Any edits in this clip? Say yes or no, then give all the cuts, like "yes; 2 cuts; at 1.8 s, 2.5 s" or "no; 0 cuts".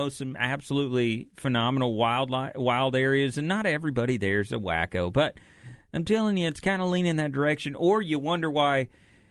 no; 0 cuts